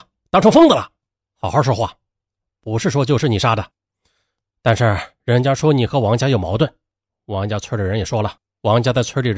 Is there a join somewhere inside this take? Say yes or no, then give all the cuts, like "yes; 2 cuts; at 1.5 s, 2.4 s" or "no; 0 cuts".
no; 0 cuts